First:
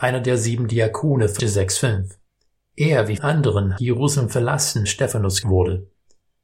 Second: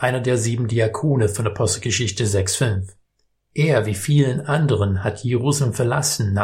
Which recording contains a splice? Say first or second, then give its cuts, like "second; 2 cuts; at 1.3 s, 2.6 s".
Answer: first; 5 cuts; at 1.4 s, 3.2 s, 3.8 s, 4.9 s, 5.4 s